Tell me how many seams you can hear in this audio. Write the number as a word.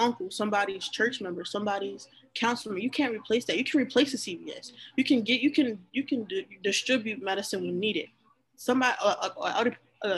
zero